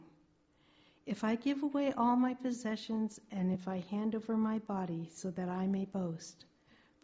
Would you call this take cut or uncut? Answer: uncut